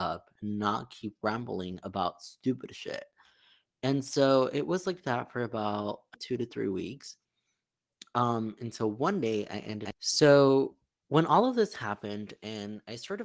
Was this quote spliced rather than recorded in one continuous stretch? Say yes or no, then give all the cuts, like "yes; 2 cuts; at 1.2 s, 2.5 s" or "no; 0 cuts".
yes; 2 cuts; at 6.1 s, 9.9 s